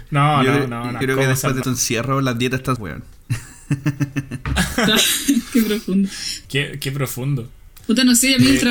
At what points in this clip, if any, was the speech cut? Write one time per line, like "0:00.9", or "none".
0:01.0
0:01.6
0:02.8